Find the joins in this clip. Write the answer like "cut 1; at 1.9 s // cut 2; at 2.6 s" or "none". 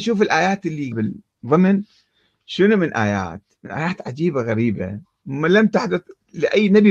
cut 1; at 0.9 s

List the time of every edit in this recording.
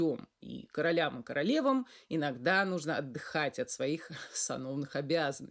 none

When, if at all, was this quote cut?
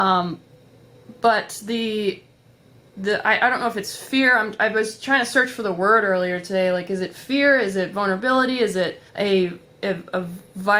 cut 1; at 9.1 s

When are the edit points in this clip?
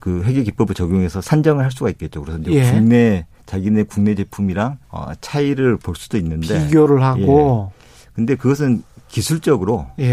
cut 1; at 4.8 s

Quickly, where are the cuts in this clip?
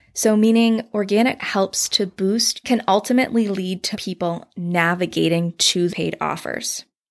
cut 1; at 1.4 s // cut 2; at 2.6 s // cut 3; at 3.9 s // cut 4; at 5.9 s

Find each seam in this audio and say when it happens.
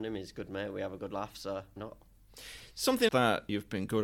cut 1; at 1.8 s // cut 2; at 3.1 s

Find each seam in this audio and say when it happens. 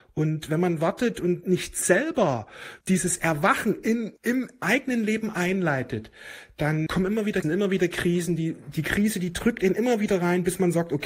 cut 1; at 2.8 s // cut 2; at 4.2 s // cut 3; at 6.9 s // cut 4; at 7.4 s

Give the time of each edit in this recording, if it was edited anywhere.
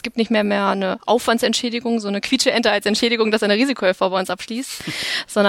none

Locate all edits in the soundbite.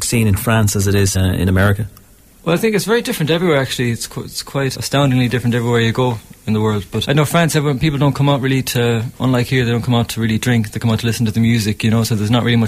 cut 1; at 1.1 s // cut 2; at 4.7 s // cut 3; at 7.0 s

